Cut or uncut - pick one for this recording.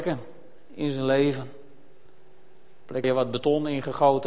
cut